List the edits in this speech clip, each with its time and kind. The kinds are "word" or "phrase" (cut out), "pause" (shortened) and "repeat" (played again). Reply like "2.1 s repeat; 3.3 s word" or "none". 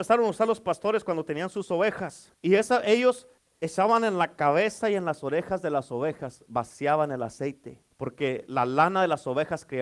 2.3 s pause; 3.4 s pause; 7.9 s pause